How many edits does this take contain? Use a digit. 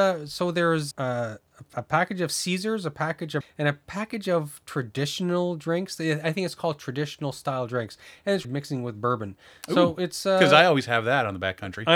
4